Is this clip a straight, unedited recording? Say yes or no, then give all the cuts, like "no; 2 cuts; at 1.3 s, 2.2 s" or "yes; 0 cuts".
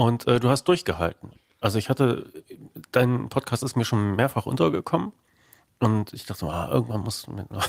yes; 0 cuts